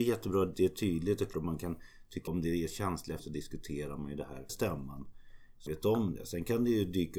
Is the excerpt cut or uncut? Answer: cut